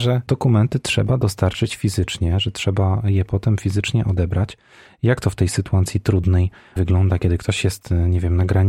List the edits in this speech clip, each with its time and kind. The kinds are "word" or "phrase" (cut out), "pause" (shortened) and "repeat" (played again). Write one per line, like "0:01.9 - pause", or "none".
0:06.8 - word